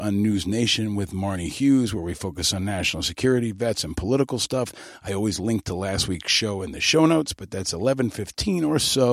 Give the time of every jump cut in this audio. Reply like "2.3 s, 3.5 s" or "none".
none